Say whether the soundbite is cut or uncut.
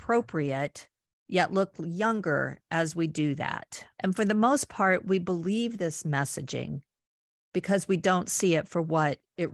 cut